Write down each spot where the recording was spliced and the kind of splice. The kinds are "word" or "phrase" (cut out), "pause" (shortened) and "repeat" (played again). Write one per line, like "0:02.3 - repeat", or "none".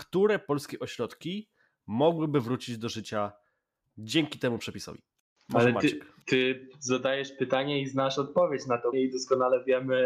0:08.9 - word